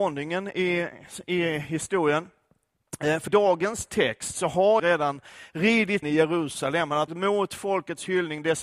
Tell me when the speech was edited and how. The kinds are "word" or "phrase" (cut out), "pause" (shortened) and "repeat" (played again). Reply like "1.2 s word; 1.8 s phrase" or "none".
3.3 s word; 4.8 s word; 6.0 s word; 7.1 s word